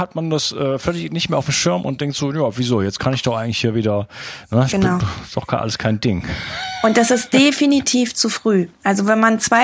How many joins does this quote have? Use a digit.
0